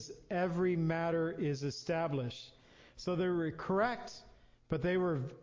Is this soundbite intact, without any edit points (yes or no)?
yes